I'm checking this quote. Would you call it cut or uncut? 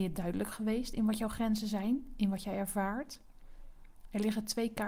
uncut